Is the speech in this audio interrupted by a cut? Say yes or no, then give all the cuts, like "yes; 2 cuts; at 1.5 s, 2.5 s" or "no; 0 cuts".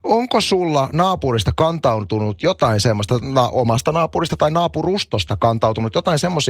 no; 0 cuts